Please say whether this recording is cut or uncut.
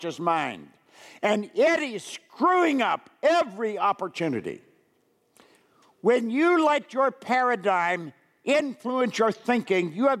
uncut